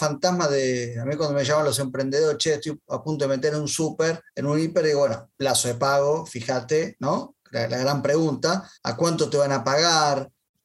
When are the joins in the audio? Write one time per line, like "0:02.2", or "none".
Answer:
0:04.3
0:05.3
0:08.8